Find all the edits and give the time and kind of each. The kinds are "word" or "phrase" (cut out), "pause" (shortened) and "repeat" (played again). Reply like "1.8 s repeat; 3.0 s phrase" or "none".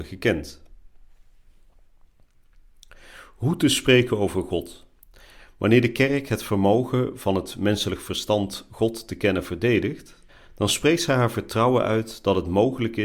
5.0 s pause; 10.3 s pause